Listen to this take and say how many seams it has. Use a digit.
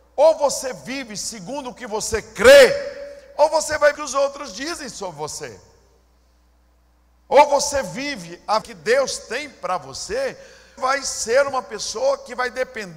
3